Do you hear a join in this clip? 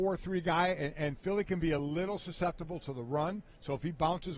no; 0 cuts

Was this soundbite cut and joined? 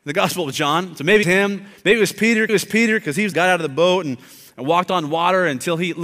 yes; 3 cuts; at 1.2 s, 2.5 s, 3.3 s

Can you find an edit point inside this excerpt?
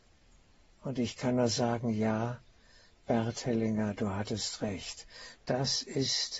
no; 0 cuts

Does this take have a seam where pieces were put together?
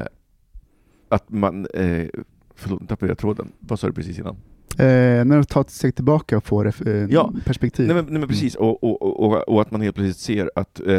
no; 0 cuts

